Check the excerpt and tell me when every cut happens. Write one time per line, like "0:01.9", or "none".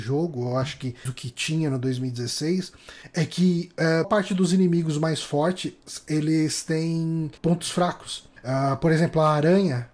0:01.1
0:04.0
0:07.4
0:08.4